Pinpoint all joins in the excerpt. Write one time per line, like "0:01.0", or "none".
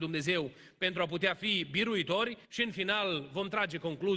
0:02.4